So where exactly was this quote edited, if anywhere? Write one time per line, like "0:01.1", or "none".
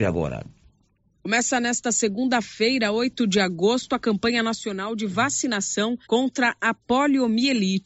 0:06.0